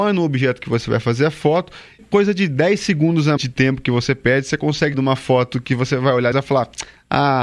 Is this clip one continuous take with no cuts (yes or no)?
no